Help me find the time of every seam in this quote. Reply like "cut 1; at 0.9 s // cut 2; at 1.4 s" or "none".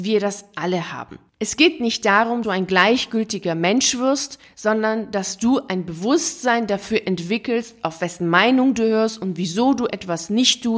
cut 1; at 2.4 s